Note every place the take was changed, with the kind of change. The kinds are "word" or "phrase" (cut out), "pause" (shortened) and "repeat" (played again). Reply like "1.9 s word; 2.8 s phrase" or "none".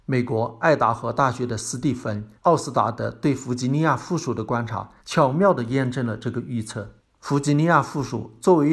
2.4 s pause; 5.0 s pause; 7.0 s pause

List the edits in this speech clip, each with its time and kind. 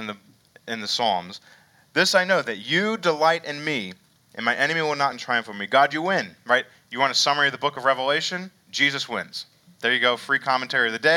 5.1 s word

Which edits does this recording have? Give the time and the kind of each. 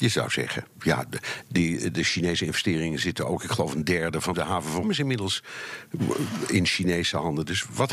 1.5 s word; 4.3 s word; 4.8 s word

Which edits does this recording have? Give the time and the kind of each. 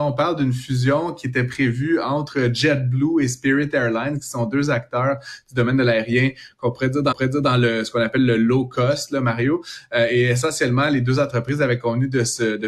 7.1 s repeat

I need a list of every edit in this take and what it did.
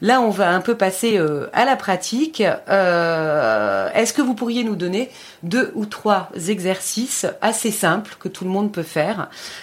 none

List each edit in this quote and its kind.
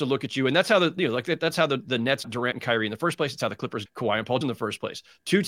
2.2 s word; 3.9 s word; 4.4 s word

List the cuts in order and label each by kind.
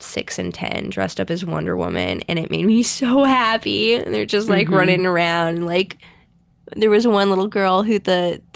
none

